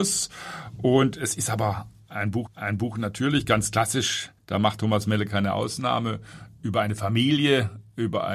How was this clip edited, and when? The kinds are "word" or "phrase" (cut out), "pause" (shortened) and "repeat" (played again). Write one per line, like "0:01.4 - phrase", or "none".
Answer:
0:02.5 - repeat
0:04.4 - pause